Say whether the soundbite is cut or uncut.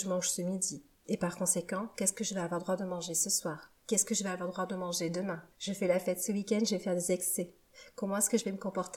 cut